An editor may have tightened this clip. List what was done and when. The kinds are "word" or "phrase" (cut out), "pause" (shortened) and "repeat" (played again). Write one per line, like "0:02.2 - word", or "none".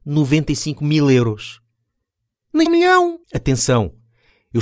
0:02.7 - word
0:03.2 - pause